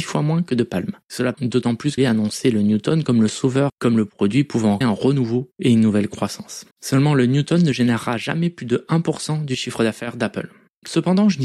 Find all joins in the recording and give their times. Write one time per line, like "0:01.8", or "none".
0:01.3
0:02.0
0:03.7
0:04.8
0:06.7